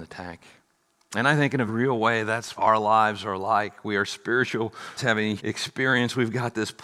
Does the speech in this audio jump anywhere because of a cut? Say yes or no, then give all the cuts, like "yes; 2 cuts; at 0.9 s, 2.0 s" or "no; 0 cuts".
yes; 4 cuts; at 1.7 s, 2.6 s, 5.0 s, 5.4 s